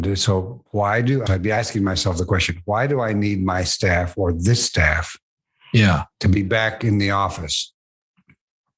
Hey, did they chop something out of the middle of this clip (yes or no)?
yes